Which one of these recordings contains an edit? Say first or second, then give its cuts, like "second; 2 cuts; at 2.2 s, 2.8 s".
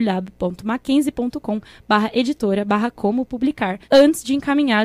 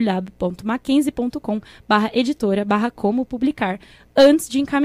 first; 1 cut; at 3.8 s